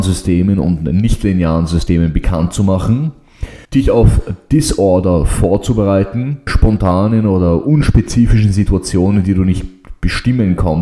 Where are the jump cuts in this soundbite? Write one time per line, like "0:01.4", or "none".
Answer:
0:03.6
0:06.5